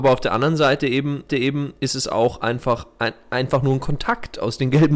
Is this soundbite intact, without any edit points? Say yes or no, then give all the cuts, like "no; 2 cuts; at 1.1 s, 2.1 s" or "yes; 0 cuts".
no; 1 cut; at 1.3 s